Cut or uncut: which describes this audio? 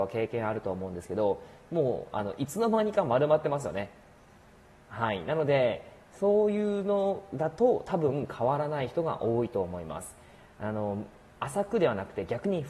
uncut